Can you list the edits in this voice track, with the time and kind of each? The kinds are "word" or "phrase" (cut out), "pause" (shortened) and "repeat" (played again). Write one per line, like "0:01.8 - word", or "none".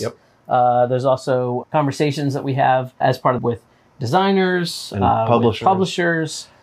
0:01.6 - word
0:03.0 - word
0:03.4 - phrase

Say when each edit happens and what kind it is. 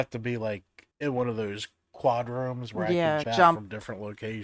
0:00.9 - pause
0:03.2 - word

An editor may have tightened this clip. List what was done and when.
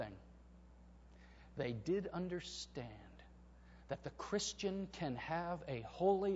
none

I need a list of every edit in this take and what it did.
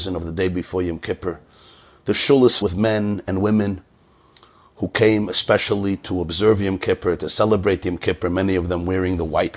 0:02.6 - word

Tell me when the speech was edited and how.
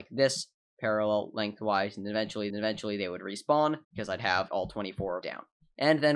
0:02.5 - repeat
0:03.8 - pause
0:04.5 - word
0:05.2 - phrase

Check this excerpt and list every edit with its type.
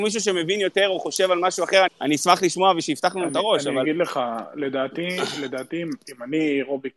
0:01.9 - word

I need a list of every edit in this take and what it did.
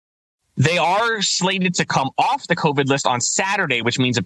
none

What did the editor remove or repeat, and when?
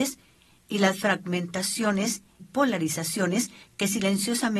0:02.4 - word

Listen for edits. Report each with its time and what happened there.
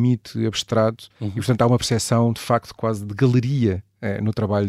0:01.1 - pause

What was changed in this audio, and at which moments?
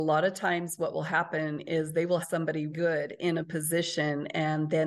0:02.2 - word
0:02.7 - word

